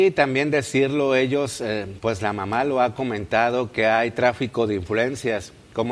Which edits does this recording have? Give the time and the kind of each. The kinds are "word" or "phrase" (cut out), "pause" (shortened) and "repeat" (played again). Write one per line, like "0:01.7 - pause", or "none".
none